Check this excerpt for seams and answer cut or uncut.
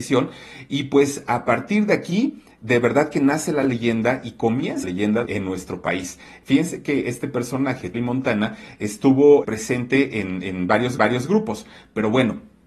cut